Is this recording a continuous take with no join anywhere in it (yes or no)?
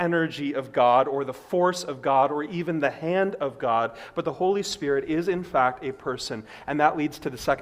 yes